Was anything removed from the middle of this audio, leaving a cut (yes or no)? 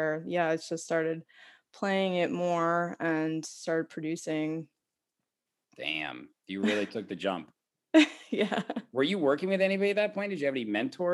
no